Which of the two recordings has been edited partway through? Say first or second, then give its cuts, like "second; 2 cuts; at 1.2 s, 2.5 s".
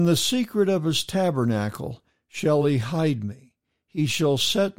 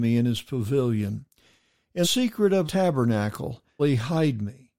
second; 3 cuts; at 2.0 s, 2.6 s, 3.8 s